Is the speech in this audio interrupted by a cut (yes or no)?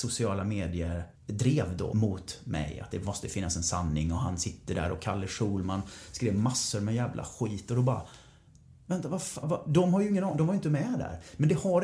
yes